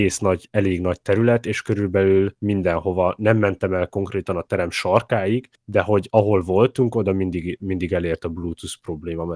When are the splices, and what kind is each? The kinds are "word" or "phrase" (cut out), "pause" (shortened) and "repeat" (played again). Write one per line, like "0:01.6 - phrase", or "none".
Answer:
0:02.4 - pause
0:05.6 - pause

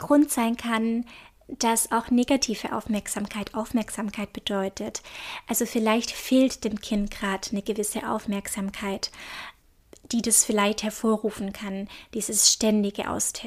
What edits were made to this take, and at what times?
none

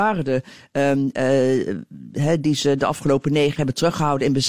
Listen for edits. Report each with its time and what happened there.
0:03.6 - word

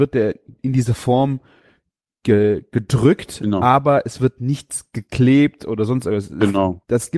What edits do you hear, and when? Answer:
none

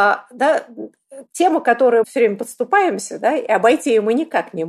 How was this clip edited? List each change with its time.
0:01.3 - pause
0:02.0 - word

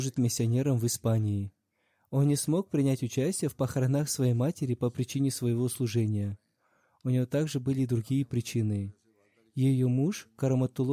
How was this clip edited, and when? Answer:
none

